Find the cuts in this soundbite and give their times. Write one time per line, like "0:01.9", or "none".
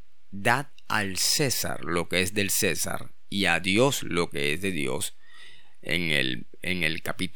none